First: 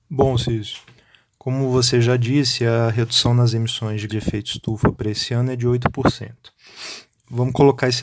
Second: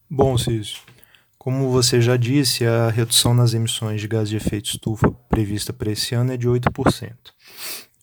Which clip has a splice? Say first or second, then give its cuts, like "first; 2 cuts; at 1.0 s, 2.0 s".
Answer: first; 2 cuts; at 4.1 s, 4.9 s